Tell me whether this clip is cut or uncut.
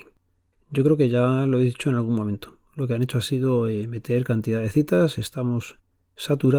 uncut